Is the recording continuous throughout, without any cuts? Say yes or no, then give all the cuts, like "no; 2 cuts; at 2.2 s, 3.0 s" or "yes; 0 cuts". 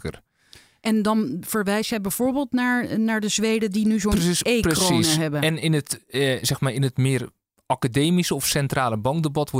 yes; 0 cuts